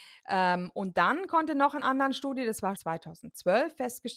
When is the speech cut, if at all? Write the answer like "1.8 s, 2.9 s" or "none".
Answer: 1.8 s, 2.7 s

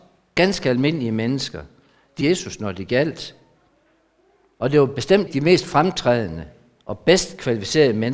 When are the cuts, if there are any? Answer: 2.2 s, 5.3 s

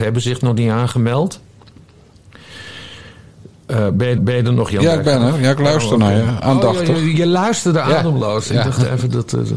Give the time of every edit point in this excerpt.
4.2 s

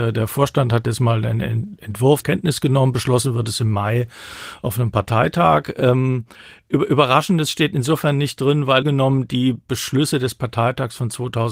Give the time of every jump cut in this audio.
2.2 s, 8.8 s

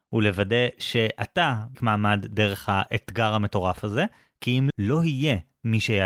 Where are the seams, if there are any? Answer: 1.7 s, 4.7 s

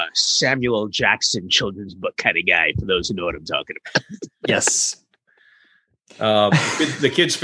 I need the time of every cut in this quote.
none

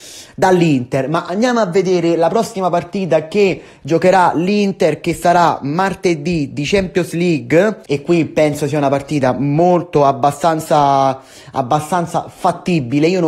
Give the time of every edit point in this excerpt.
7.8 s

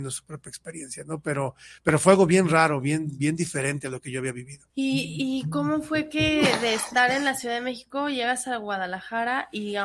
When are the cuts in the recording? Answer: 4.7 s

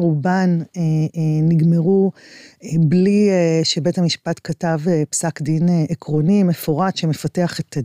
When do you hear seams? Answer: none

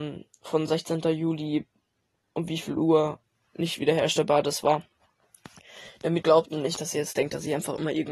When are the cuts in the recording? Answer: 6.2 s

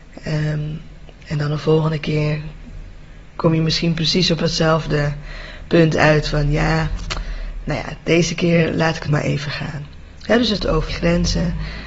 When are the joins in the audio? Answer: 9.1 s, 10.6 s, 10.9 s

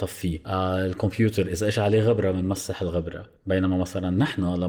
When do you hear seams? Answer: 3.4 s

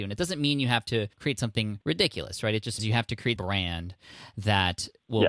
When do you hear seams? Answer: 1.1 s, 1.8 s, 2.8 s, 3.4 s

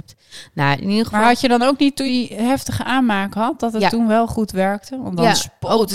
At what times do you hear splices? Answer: 2.1 s

